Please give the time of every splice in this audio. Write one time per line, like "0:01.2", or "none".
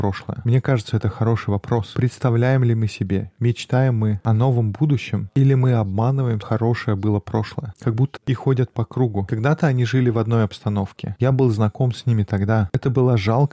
0:06.4
0:07.7
0:08.2